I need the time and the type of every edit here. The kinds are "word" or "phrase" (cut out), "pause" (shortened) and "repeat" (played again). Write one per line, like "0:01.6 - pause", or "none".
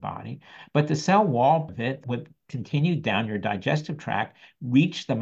0:01.7 - word
0:02.0 - word